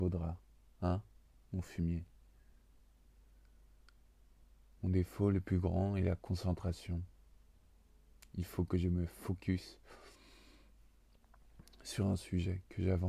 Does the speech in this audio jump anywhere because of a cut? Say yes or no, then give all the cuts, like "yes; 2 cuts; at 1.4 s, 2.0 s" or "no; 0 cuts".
no; 0 cuts